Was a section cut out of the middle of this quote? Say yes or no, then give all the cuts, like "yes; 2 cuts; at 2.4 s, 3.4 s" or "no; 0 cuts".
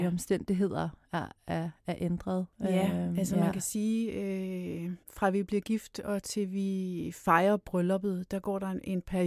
yes; 2 cuts; at 2.5 s, 5.0 s